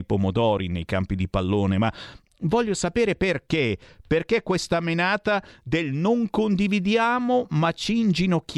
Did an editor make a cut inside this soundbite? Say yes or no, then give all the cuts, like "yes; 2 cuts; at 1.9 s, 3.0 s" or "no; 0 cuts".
no; 0 cuts